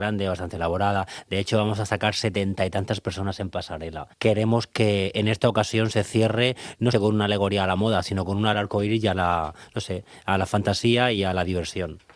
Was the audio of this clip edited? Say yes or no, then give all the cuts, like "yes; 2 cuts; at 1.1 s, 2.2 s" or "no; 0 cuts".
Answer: yes; 3 cuts; at 4.1 s, 6.9 s, 8.5 s